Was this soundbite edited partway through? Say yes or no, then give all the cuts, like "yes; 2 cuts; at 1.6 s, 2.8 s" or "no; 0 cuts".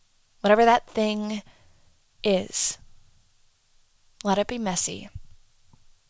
no; 0 cuts